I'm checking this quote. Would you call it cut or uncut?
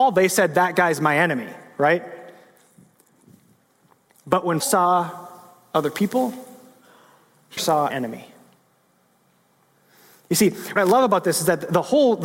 cut